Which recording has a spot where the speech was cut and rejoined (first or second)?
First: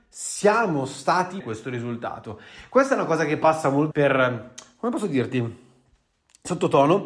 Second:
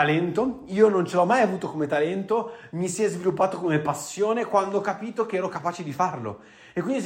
first